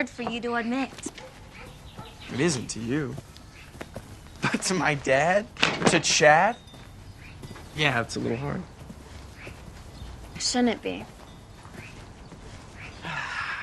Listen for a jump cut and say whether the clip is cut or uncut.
uncut